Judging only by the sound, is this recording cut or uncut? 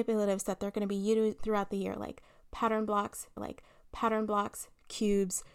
cut